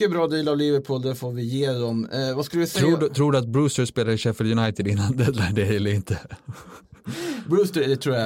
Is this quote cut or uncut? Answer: uncut